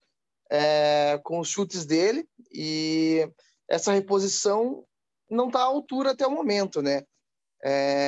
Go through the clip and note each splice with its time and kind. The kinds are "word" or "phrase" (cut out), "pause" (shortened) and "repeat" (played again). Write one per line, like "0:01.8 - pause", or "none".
none